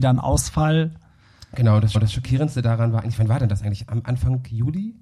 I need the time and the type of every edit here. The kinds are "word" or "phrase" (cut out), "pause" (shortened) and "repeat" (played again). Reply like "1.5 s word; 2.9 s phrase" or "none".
1.9 s repeat